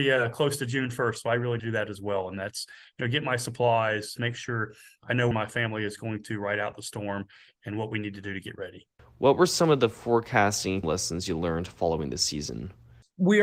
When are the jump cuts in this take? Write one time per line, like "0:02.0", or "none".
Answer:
0:01.6
0:04.2
0:05.3
0:10.8